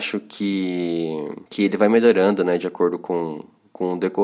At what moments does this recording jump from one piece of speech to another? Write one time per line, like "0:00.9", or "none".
0:01.5